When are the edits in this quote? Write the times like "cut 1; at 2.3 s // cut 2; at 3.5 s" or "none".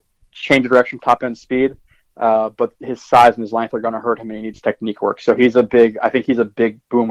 cut 1; at 1.0 s